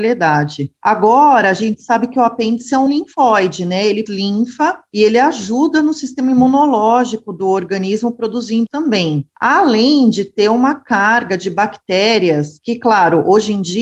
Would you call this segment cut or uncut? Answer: cut